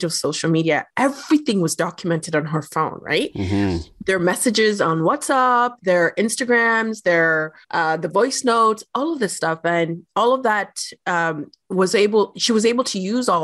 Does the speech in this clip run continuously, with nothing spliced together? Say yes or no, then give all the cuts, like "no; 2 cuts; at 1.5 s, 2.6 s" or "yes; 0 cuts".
no; 1 cut; at 7.6 s